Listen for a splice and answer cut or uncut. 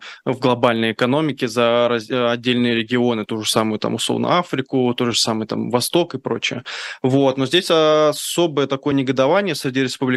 uncut